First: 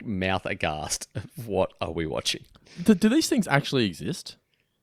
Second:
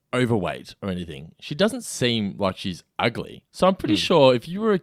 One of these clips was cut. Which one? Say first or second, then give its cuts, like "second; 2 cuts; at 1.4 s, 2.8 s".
second; 1 cut; at 3.5 s